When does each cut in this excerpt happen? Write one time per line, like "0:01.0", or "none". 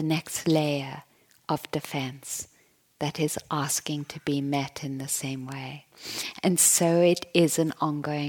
none